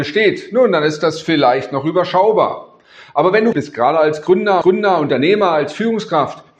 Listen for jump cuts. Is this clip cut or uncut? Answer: cut